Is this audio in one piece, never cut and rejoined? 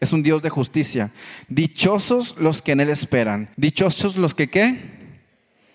no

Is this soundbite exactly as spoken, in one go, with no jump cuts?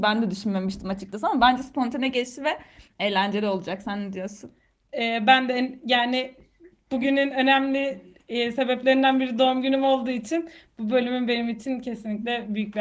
yes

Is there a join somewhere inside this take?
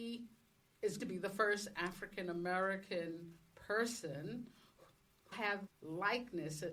yes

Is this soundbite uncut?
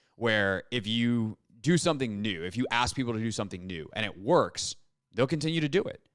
yes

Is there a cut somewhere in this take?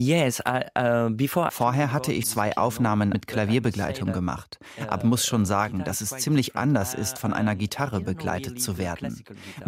yes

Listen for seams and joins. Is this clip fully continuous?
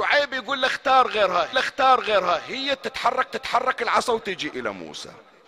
no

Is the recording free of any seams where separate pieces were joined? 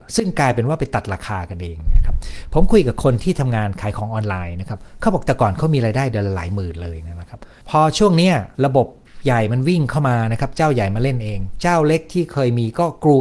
no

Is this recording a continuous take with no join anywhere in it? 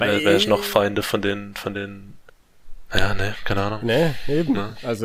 yes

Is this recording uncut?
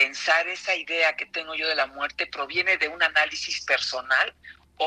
yes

